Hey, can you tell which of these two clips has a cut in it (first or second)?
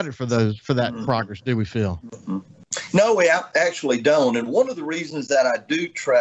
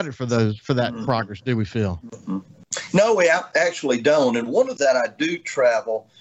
second